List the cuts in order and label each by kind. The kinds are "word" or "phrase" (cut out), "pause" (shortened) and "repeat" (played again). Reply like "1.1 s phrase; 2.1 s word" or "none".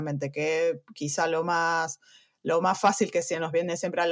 none